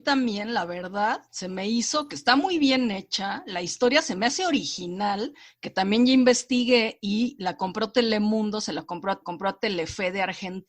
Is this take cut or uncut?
cut